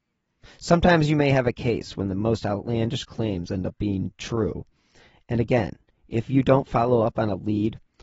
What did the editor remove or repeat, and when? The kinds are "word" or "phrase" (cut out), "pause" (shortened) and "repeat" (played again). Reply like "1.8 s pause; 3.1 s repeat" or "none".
none

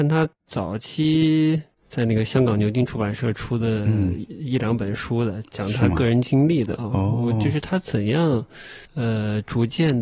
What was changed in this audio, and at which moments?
8.9 s pause

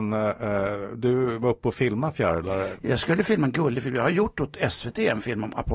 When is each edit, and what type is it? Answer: none

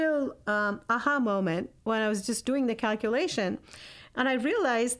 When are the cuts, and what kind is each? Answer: 1.8 s pause

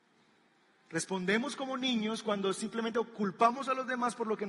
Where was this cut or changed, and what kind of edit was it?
none

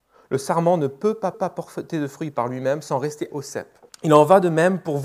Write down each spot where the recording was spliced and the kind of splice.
1.3 s repeat; 3.3 s word; 3.9 s pause

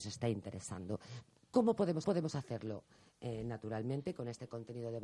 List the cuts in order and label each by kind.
2.0 s repeat

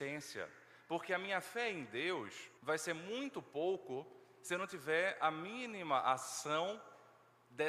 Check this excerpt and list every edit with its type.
2.6 s pause

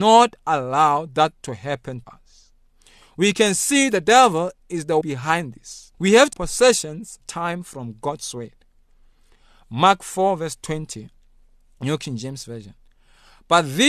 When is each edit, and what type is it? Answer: 2.0 s word; 5.0 s word; 5.9 s pause; 6.3 s phrase; 7.2 s phrase

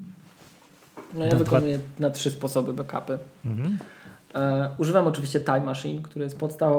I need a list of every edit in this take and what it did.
none

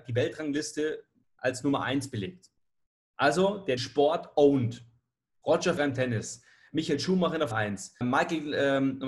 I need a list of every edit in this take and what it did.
3.8 s word; 5.8 s word; 7.5 s word; 8.0 s word

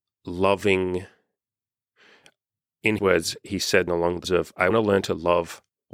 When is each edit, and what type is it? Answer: 3.0 s word; 3.9 s word; 4.2 s word; 4.7 s word

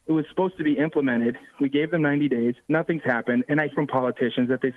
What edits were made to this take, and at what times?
2.6 s pause; 3.7 s word

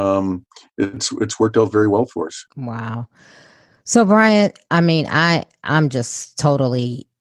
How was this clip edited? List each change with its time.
2.5 s pause

